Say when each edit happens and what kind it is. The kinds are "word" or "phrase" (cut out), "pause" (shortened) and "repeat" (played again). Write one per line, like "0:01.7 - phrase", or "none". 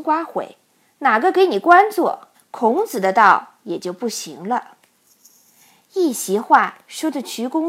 0:02.3 - pause